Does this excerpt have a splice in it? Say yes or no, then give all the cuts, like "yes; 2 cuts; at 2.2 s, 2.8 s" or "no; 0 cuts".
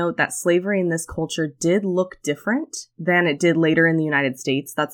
yes; 1 cut; at 2.9 s